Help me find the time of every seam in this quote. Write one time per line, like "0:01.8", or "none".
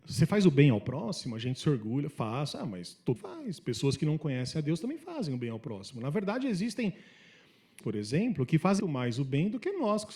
0:03.2
0:07.8
0:08.8